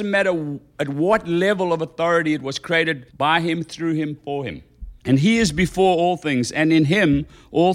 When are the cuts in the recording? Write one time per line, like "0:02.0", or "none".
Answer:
0:03.1
0:05.0